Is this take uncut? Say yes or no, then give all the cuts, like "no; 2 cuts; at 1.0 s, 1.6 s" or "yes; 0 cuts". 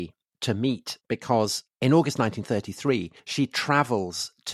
no; 2 cuts; at 1.0 s, 3.2 s